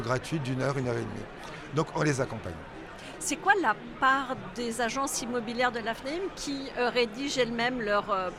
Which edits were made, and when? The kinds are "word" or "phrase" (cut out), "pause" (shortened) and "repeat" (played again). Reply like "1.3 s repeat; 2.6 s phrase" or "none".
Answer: none